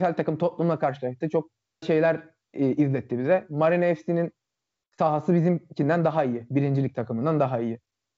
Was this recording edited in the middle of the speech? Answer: yes; 1 cut; at 1.8 s

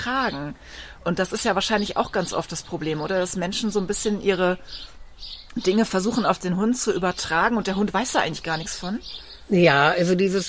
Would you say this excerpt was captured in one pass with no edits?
yes; 0 cuts

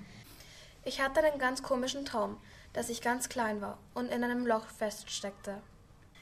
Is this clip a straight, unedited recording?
yes; 0 cuts

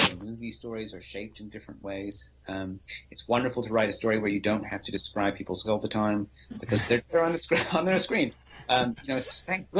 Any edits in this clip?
yes; 2 cuts; at 5.6 s, 7.0 s

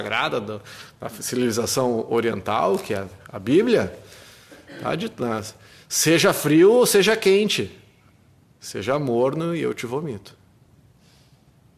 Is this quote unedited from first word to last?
yes; 0 cuts

